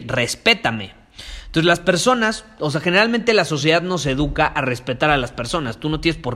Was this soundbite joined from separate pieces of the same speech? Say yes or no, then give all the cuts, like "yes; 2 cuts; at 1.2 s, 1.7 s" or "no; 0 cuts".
no; 0 cuts